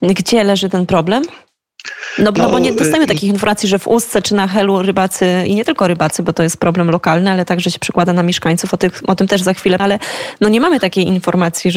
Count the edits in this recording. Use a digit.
2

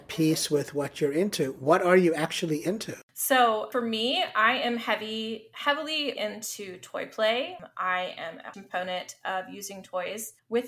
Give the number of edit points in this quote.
2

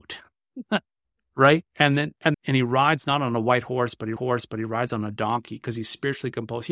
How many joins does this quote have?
3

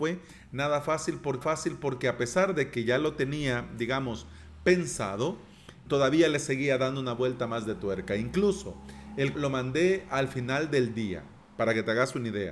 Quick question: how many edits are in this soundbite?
3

